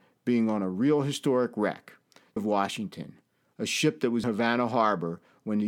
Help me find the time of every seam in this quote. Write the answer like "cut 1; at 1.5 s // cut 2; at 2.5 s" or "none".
cut 1; at 2.4 s // cut 2; at 4.2 s